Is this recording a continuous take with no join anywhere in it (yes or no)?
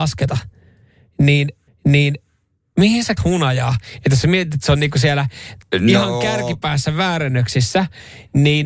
no